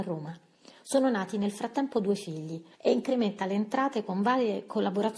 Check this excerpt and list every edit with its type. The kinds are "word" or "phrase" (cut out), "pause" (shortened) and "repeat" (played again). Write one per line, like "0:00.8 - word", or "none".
0:02.7 - pause

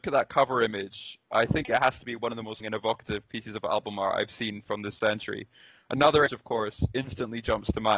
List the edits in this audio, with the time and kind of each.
0:02.6 - word
0:06.3 - word

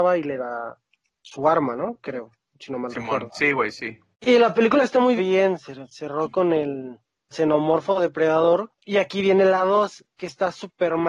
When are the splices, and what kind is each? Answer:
0:04.1 - pause
0:05.2 - phrase
0:07.3 - word
0:08.8 - pause

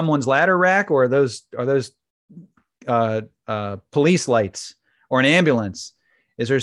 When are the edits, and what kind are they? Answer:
none

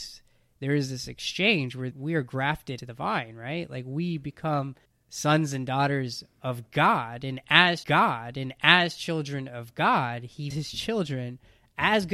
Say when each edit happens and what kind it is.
0:01.9 - word
0:02.8 - word
0:04.8 - pause
0:07.8 - repeat
0:10.5 - word

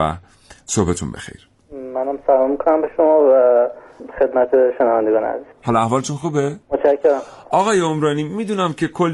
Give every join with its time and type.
0:01.6 - pause
0:05.5 - pause
0:06.6 - pause

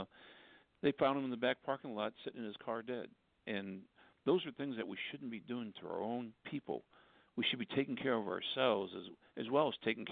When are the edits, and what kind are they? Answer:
none

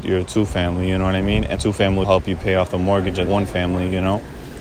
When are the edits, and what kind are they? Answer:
0:01.6 - word
0:02.0 - word
0:03.3 - word

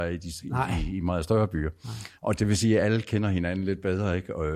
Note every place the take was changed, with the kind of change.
0:02.2 - pause

